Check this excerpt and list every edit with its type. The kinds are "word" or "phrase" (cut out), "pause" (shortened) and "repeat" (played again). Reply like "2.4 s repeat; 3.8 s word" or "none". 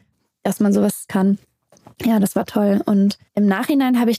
1.1 s word; 3.3 s pause